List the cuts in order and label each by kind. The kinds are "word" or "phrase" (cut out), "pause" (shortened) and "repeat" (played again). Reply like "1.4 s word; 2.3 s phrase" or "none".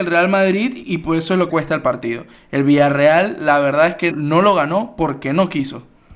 1.5 s word; 4.1 s word